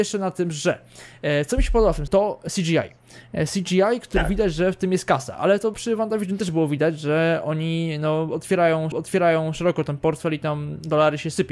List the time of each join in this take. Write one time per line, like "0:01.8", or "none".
0:02.1
0:05.7
0:08.9

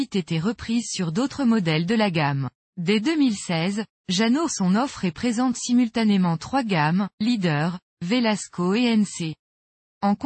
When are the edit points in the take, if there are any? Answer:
0:02.6
0:04.5
0:07.1

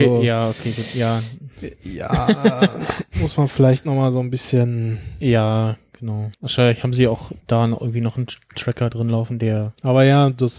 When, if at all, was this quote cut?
0:06.3
0:07.4

